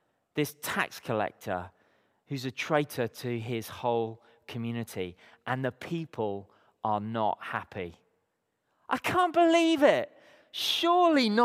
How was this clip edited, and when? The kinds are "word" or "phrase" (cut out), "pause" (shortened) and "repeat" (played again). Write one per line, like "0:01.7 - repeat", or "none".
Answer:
none